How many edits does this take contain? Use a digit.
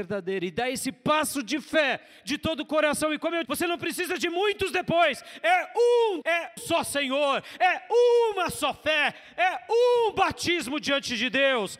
3